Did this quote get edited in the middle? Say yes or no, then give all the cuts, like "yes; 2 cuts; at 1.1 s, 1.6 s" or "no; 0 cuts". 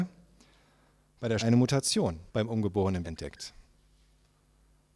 yes; 3 cuts; at 1.4 s, 2.3 s, 3.0 s